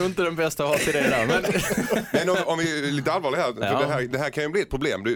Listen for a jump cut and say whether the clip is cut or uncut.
uncut